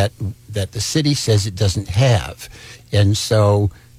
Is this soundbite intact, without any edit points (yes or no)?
yes